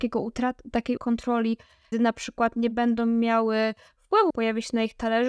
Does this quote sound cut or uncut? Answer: cut